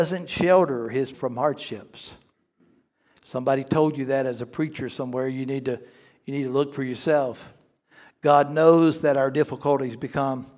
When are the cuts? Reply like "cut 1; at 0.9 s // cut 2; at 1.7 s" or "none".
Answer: cut 1; at 1.1 s